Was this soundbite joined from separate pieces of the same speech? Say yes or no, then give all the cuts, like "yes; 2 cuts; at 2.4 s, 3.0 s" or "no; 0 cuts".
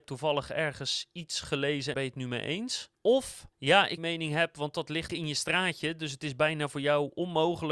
yes; 4 cuts; at 1.9 s, 3.5 s, 4.0 s, 5.1 s